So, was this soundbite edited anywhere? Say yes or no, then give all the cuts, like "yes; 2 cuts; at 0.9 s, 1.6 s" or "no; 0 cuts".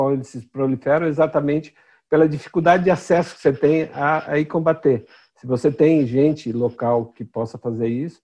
no; 0 cuts